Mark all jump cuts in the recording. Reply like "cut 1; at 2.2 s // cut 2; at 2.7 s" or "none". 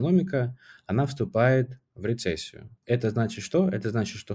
cut 1; at 2.8 s